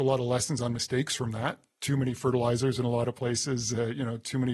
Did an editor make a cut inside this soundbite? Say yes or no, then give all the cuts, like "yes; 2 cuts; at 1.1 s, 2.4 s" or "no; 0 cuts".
no; 0 cuts